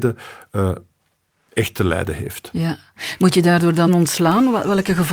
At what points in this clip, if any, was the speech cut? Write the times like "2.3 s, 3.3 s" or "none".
3.9 s